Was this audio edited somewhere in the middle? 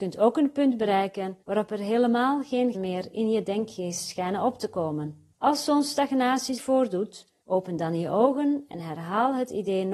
yes; 5 cuts; at 1.4 s, 2.7 s, 5.3 s, 6.6 s, 7.4 s

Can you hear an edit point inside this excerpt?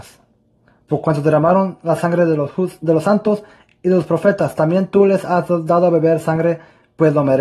no; 0 cuts

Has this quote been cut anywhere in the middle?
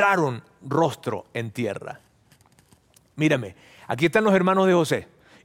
no; 0 cuts

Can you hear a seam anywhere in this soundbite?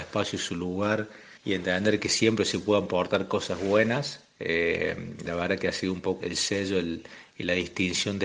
yes; 2 cuts; at 1.4 s, 6.2 s

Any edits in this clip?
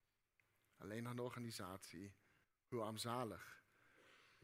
yes; 1 cut; at 2.4 s

